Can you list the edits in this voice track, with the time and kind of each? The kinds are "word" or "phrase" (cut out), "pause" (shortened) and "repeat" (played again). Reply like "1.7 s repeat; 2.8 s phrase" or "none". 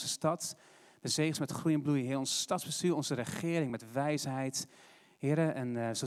none